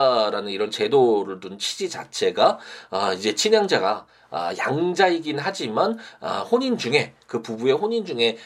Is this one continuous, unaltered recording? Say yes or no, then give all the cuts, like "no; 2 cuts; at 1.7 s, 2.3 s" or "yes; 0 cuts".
yes; 0 cuts